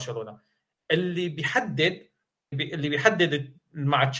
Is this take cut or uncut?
cut